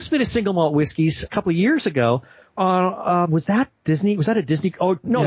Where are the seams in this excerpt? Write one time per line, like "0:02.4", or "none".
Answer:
0:01.3
0:02.6
0:03.3

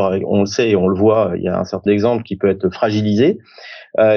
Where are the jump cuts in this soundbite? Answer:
0:01.9

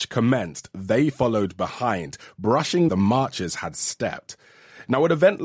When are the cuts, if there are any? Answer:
0:02.9

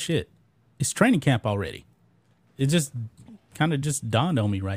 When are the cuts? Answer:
none

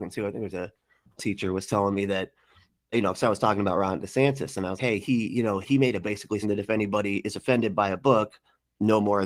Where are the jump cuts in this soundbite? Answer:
0:01.2
0:02.9
0:04.8
0:05.6
0:06.0
0:06.4

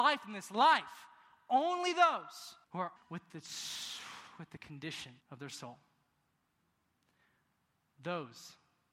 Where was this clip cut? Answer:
0:02.6
0:03.0
0:05.2

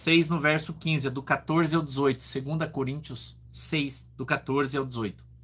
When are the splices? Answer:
0:03.5

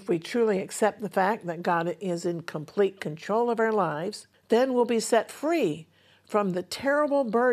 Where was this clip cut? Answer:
0:04.3

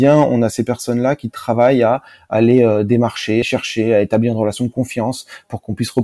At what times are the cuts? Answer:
0:03.4

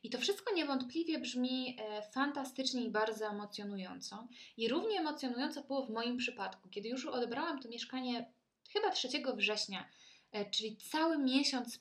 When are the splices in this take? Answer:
none

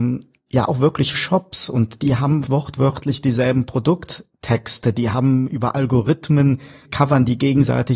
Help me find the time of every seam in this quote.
0:01.1
0:02.5
0:06.8

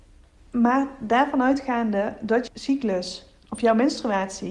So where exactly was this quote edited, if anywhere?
0:02.5

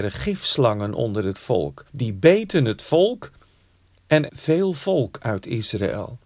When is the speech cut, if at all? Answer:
0:01.9
0:04.3

